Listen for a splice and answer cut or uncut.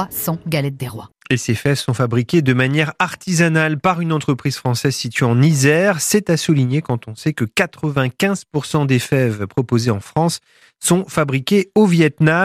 uncut